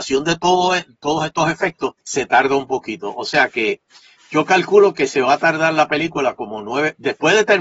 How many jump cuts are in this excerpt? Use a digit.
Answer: 1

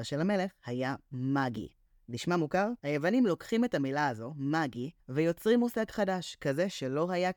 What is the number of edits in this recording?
3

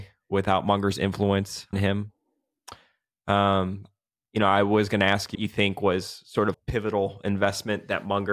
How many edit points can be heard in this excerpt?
3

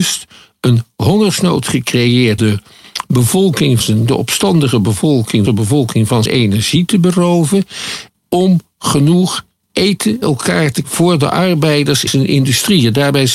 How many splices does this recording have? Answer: 8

